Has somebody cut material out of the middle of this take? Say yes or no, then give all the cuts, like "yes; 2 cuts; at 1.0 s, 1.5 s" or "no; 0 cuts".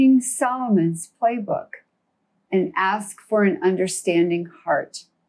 no; 0 cuts